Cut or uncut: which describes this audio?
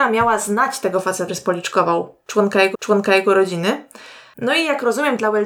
cut